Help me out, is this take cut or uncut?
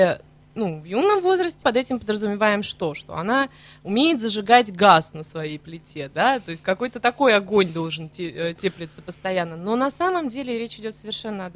cut